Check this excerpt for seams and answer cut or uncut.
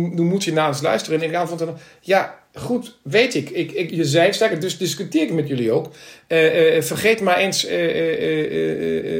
cut